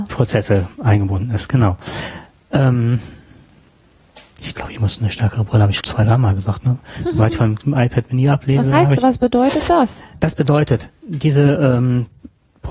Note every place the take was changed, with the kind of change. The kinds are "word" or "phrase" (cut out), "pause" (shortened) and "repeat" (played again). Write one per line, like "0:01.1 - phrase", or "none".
0:05.8 - word